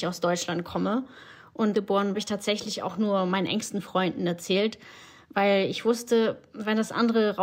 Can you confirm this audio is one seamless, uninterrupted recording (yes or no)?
no